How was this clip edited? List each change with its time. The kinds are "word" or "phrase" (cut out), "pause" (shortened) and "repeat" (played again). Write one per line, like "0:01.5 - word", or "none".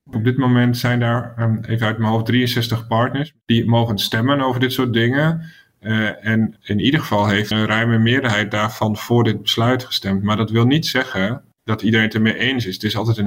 0:03.4 - pause
0:06.6 - word
0:07.5 - word
0:11.5 - pause